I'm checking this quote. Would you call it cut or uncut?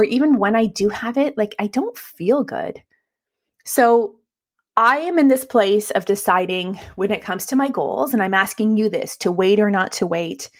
uncut